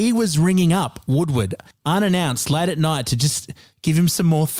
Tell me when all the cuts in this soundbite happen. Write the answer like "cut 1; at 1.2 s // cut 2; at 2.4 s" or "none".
none